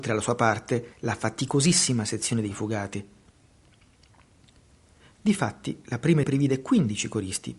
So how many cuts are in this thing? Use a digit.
2